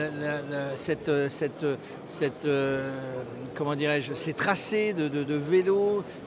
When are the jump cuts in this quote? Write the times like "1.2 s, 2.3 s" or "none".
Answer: 5.3 s